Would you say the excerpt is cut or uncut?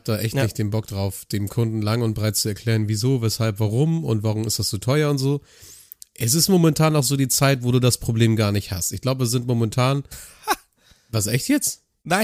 uncut